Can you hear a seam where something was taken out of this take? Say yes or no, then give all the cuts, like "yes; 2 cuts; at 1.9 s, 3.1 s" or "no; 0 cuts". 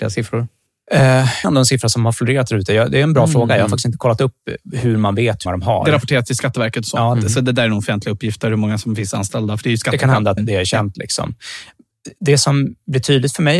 yes; 4 cuts; at 1.4 s, 5.5 s, 10.4 s, 12.2 s